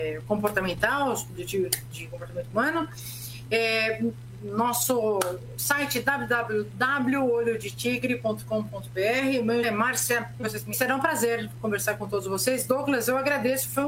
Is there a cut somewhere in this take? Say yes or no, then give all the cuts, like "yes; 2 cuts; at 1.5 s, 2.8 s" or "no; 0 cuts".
yes; 4 cuts; at 1.3 s, 9.6 s, 10.4 s, 10.7 s